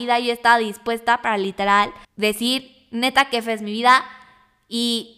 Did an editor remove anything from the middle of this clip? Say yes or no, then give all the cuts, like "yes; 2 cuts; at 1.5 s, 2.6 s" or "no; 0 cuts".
yes; 1 cut; at 2.0 s